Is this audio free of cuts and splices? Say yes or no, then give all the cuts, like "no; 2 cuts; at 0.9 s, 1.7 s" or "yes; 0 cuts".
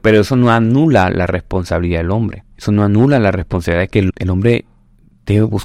no; 2 cuts; at 2.5 s, 4.1 s